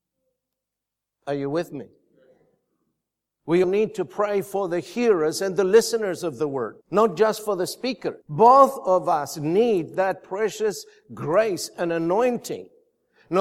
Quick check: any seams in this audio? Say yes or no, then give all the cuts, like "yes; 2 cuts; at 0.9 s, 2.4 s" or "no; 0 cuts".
yes; 3 cuts; at 3.6 s, 6.8 s, 8.2 s